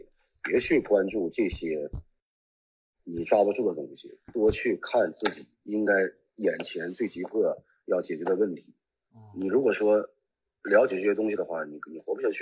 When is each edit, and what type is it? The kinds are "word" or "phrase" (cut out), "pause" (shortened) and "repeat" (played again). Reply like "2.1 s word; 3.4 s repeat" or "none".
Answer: 5.5 s pause

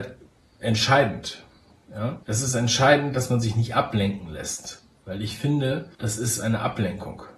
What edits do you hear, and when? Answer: 2.2 s pause; 5.9 s pause

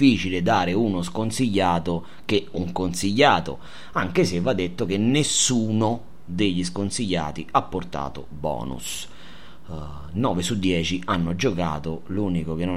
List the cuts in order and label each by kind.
none

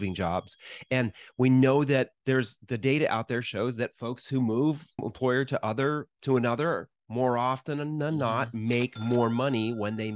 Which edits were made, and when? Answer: 2.2 s pause; 5.0 s phrase

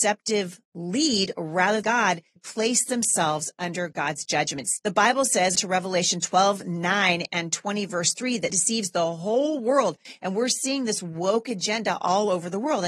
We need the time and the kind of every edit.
1.8 s word; 2.4 s word; 5.5 s word; 8.5 s word

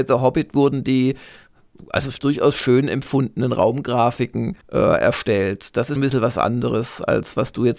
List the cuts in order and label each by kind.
2.2 s phrase; 4.6 s pause; 6.0 s word

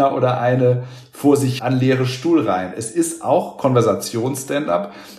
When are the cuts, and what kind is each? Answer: 1.6 s word

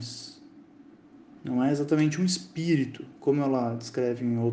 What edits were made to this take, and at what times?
none

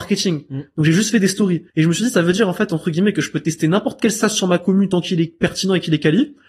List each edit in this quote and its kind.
1.7 s pause

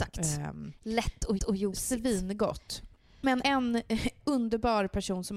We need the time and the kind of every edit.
1.4 s repeat; 3.4 s word

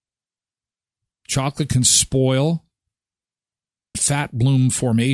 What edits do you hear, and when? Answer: 3.9 s word

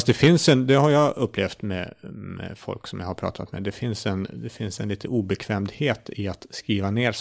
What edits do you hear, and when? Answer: none

